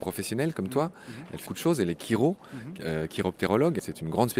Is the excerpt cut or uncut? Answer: cut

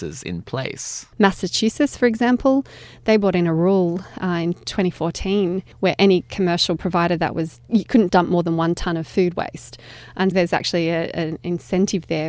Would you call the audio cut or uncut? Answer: cut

